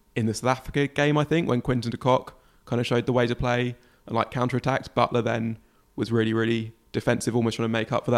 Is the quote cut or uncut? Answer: uncut